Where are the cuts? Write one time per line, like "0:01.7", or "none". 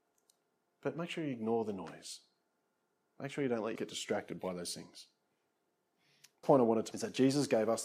0:03.8
0:06.4
0:06.9